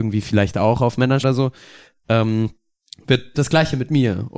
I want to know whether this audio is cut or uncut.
cut